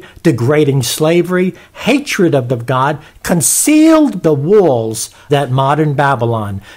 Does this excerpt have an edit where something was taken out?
yes; 3 cuts; at 2.5 s, 4.2 s, 5.3 s

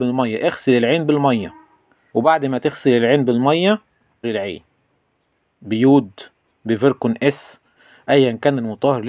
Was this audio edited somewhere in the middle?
yes; 2 cuts; at 2.1 s, 4.2 s

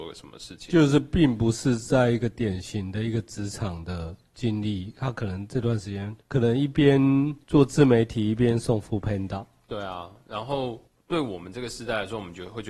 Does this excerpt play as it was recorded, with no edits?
no; 3 cuts; at 6.2 s, 7.4 s, 10.9 s

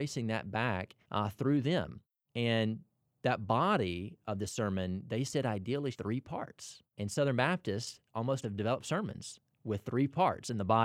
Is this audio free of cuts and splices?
no; 4 cuts; at 1.0 s, 5.9 s, 6.9 s, 8.4 s

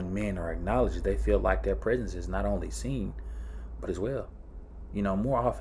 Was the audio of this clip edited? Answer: yes; 1 cut; at 3.9 s

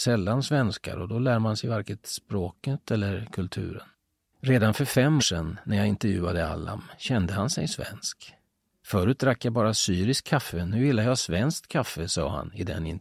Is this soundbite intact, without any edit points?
no; 1 cut; at 5.2 s

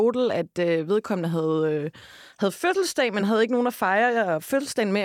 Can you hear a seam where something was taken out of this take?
no; 0 cuts

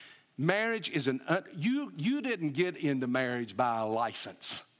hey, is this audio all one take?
yes; 0 cuts

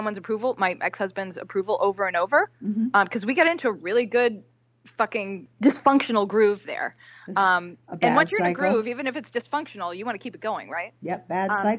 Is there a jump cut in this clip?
no; 0 cuts

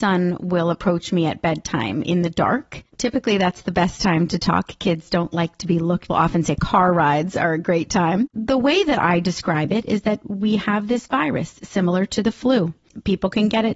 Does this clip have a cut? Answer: yes; 3 cuts; at 2.9 s, 6.1 s, 8.3 s

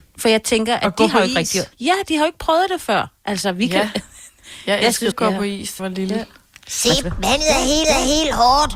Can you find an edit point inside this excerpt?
yes; 6 cuts; at 1.7 s, 3.2 s, 5.1 s, 5.8 s, 7.0 s, 7.8 s

